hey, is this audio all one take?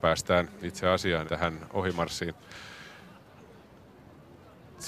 no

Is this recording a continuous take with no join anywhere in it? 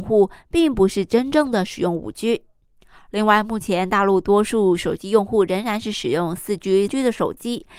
no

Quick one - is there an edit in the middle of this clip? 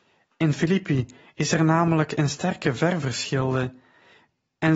no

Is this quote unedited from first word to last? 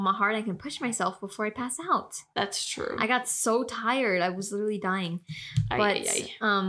yes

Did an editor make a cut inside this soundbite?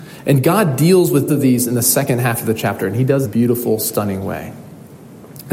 yes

